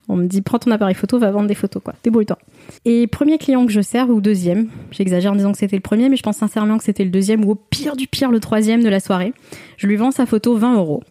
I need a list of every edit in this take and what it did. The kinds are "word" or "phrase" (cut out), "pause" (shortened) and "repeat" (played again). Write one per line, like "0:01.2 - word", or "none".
0:02.8 - pause